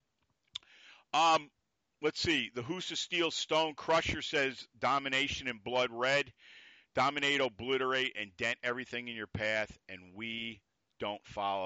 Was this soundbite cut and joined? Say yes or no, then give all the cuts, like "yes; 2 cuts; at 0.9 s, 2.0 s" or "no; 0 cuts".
no; 0 cuts